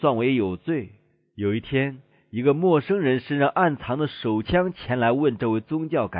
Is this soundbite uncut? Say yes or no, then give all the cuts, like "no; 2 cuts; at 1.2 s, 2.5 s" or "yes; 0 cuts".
yes; 0 cuts